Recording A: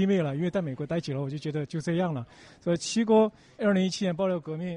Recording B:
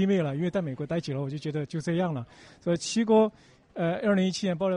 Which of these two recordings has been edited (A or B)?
A